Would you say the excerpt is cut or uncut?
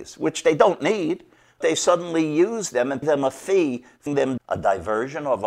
cut